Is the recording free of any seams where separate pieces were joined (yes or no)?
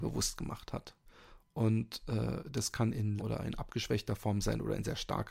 no